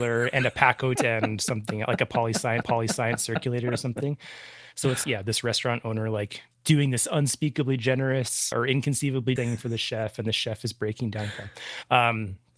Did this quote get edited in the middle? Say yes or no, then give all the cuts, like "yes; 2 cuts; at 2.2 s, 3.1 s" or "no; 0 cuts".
yes; 6 cuts; at 1.0 s, 2.6 s, 5.0 s, 6.5 s, 8.5 s, 9.4 s